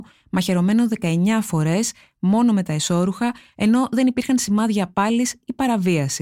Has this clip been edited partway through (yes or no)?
no